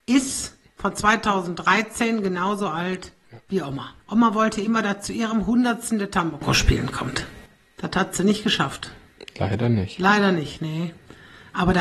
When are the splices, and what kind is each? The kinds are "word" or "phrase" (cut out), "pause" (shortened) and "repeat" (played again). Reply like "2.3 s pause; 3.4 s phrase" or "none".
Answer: 4.0 s pause; 7.5 s pause